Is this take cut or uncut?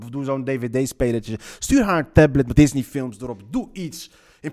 cut